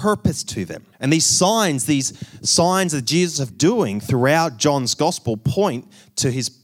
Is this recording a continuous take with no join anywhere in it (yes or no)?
no